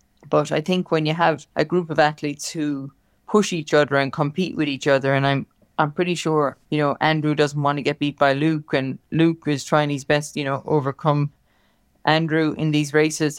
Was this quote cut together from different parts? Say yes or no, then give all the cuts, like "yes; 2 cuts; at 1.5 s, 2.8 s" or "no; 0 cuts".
yes; 3 cuts; at 1.5 s, 6.6 s, 10.3 s